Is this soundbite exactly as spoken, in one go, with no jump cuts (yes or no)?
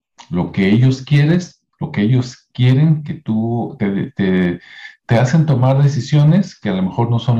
no